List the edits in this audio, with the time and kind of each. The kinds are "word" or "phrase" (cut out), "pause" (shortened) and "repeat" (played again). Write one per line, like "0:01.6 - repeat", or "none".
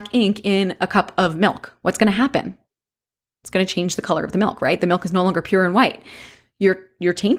none

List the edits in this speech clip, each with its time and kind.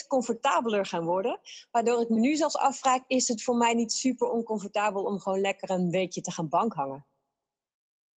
none

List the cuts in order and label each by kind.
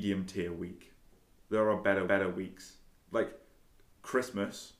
0:02.1 - repeat

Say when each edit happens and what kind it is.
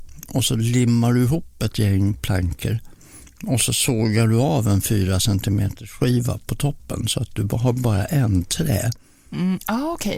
none

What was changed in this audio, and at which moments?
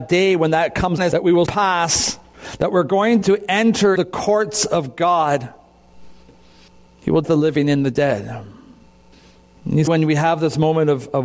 0:01.0 - word
0:01.5 - word
0:03.2 - word
0:04.0 - word
0:07.2 - word
0:09.9 - word

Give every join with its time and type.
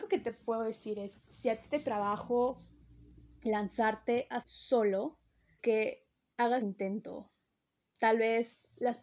0:01.2 - word
0:01.8 - word
0:04.4 - word
0:05.6 - word
0:06.6 - word

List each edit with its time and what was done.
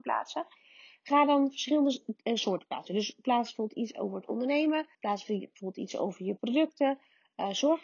0:04.9 - pause

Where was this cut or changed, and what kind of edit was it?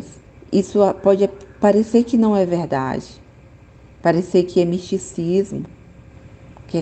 none

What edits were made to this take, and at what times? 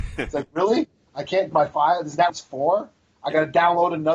0:01.5 - word
0:02.3 - word

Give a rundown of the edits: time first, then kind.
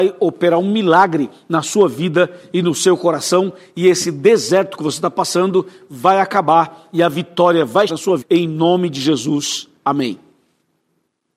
0:07.9 - word
0:08.2 - word

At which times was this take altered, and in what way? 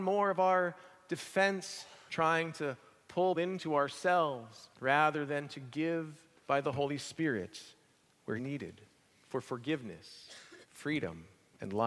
0:02.1 - word
0:03.4 - word
0:04.7 - pause
0:06.4 - word
0:08.4 - word
0:10.6 - pause

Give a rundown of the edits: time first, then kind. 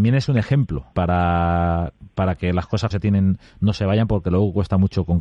0:00.9 - word
0:02.9 - word

